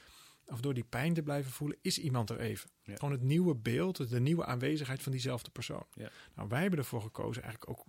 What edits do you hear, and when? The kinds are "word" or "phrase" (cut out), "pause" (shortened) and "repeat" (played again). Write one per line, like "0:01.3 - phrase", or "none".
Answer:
0:03.0 - word